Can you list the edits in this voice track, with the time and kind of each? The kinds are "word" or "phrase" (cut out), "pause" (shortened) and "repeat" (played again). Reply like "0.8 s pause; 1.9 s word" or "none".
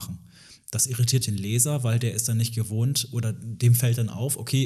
1.2 s word